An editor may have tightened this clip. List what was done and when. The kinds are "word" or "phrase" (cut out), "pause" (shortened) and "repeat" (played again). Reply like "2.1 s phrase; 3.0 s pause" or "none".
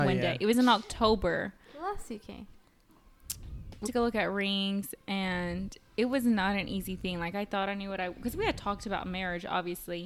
3.8 s word